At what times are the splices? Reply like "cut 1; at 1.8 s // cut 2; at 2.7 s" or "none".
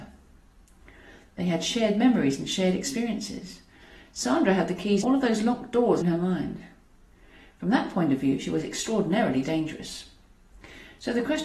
cut 1; at 5.0 s // cut 2; at 6.0 s